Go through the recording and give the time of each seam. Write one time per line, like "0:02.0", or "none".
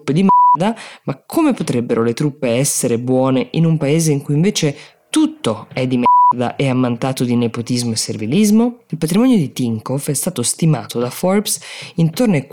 none

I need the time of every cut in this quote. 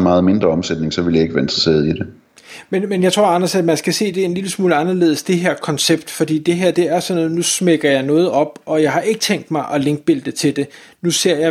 none

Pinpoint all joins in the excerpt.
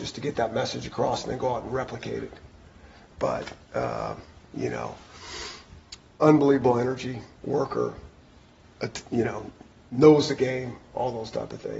none

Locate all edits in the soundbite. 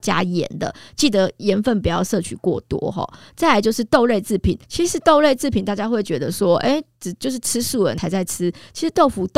0:04.6

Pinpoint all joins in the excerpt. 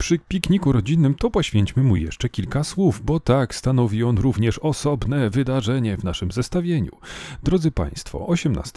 none

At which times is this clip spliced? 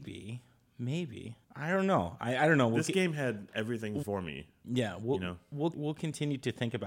0:01.4
0:04.0
0:05.7

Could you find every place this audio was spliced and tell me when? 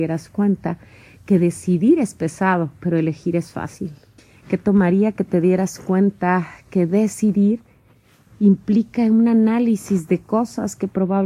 0:04.2

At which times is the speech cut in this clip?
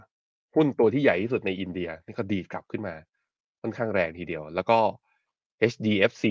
none

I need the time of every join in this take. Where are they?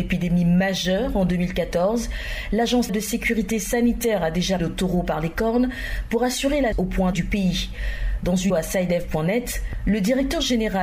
0:02.9
0:04.6
0:06.7
0:07.1
0:08.5

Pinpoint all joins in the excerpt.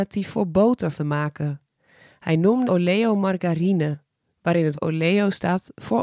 0:00.9
0:02.7
0:04.8

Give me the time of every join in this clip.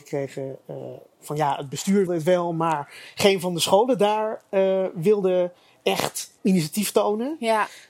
0:02.1
0:06.4

